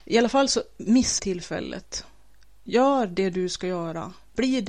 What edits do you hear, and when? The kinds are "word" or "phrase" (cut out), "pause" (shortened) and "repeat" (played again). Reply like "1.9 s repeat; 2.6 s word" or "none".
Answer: 1.2 s word